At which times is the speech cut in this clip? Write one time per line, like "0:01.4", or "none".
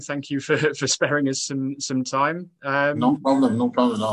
none